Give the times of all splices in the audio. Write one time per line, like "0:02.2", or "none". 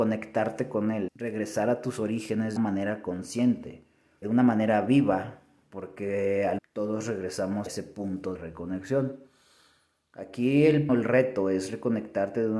0:01.1
0:02.6
0:04.2
0:06.6
0:07.7
0:08.3
0:10.9